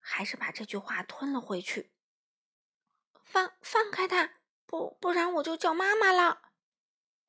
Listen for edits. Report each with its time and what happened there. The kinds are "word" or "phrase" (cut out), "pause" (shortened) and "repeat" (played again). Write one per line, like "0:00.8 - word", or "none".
none